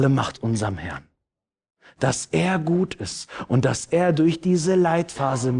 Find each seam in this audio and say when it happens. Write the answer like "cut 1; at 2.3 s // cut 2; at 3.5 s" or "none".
none